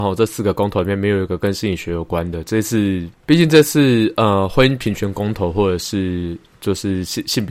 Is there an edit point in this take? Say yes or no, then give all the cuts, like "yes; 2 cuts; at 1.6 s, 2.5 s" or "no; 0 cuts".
yes; 1 cut; at 3.1 s